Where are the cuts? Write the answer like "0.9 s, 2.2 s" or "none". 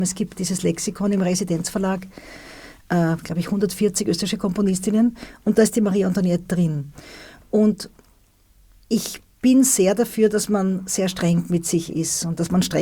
none